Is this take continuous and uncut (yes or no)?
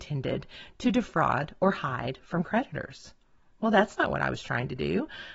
yes